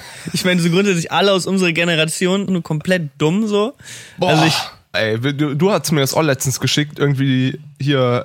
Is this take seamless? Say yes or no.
no